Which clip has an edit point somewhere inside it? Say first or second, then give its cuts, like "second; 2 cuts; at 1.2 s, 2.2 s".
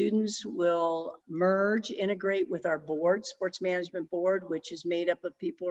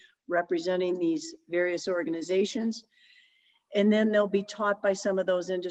first; 1 cut; at 1.2 s